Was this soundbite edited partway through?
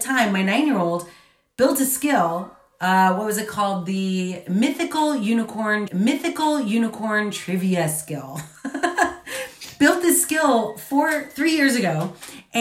yes; 1 cut; at 5.9 s

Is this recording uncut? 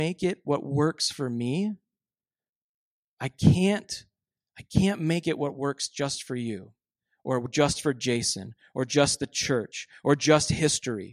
yes; 0 cuts

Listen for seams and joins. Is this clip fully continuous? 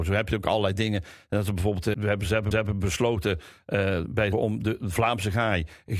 no; 3 cuts; at 1.9 s, 2.5 s, 4.3 s

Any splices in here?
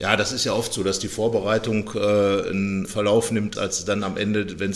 yes; 2 cuts; at 2.8 s, 3.5 s

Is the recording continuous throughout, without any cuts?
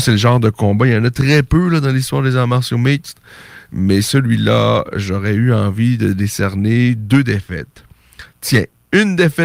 yes; 0 cuts

